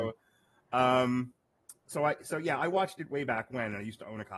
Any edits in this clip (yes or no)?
no